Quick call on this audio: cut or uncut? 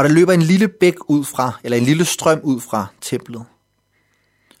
uncut